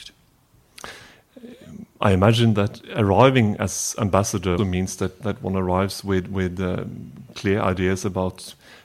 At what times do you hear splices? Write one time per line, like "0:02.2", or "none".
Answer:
0:04.6